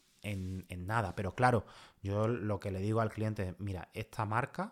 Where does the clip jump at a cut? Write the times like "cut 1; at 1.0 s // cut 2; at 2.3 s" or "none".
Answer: none